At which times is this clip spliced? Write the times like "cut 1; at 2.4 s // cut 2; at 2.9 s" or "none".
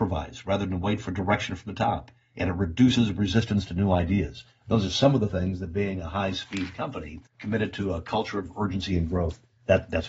cut 1; at 7.3 s